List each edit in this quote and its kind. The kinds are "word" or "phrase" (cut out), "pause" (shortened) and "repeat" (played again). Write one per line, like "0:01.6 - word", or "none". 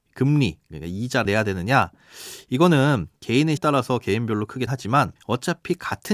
0:01.2 - word
0:03.6 - word
0:04.7 - word
0:05.2 - pause